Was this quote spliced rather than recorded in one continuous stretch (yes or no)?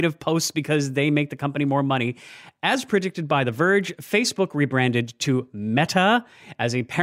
no